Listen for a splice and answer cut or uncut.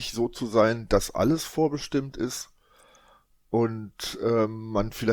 uncut